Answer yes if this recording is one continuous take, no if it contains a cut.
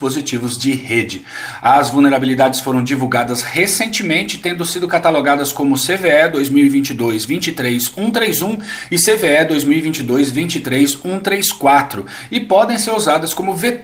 yes